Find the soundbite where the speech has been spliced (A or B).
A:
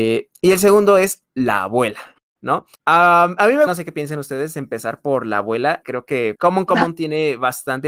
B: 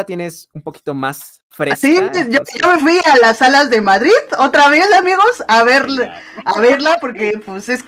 A